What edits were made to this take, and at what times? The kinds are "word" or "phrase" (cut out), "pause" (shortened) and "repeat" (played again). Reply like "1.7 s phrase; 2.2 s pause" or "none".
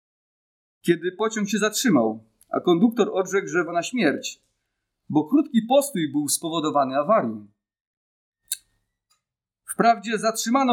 3.7 s word